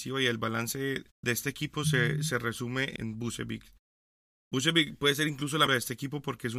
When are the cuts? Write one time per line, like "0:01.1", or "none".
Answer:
0:01.1
0:03.0
0:05.7